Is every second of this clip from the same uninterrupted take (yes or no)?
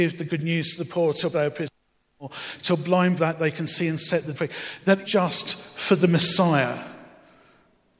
no